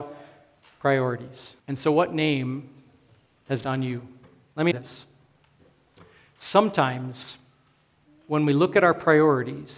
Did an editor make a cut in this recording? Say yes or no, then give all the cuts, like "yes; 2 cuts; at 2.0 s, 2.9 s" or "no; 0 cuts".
yes; 3 cuts; at 1.6 s, 3.6 s, 4.7 s